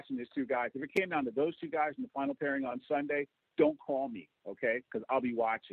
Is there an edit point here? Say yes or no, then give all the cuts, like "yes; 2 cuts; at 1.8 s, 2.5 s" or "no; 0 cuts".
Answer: no; 0 cuts